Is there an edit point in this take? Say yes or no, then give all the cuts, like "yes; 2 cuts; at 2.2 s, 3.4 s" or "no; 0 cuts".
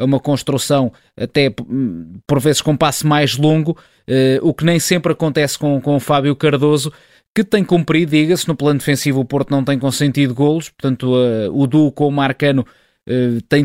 no; 0 cuts